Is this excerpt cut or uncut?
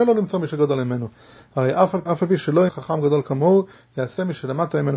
cut